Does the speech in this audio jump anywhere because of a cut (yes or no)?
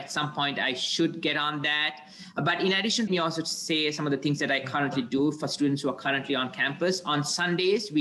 yes